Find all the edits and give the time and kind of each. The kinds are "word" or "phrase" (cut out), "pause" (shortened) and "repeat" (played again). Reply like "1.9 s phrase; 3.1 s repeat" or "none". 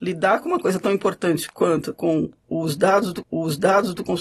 1.9 s word; 3.2 s repeat